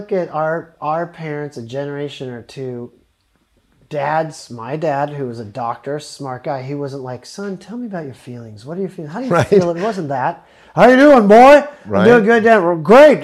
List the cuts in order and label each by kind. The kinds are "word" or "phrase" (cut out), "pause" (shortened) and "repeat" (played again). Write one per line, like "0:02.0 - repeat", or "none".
none